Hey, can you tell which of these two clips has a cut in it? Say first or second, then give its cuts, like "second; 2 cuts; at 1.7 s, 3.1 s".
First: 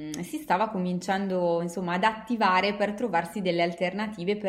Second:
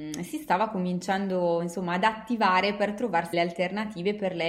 second; 1 cut; at 3.3 s